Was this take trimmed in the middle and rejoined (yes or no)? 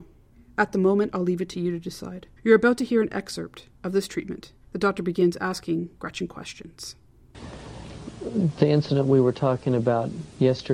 yes